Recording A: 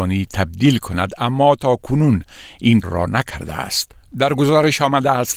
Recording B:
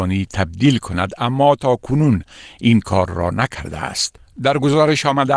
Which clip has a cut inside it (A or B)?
A